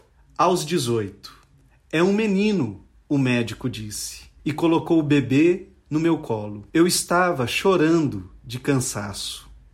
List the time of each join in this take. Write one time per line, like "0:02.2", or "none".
0:01.5
0:04.4
0:06.7